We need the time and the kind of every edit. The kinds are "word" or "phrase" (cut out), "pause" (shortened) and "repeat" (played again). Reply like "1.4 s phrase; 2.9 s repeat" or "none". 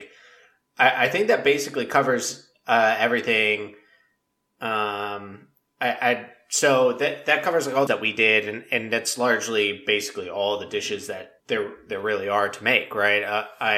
7.9 s phrase; 11.4 s pause